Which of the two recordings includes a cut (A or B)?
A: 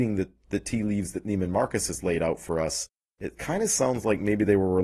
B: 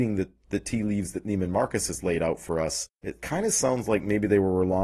B